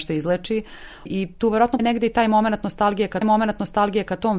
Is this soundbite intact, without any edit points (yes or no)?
no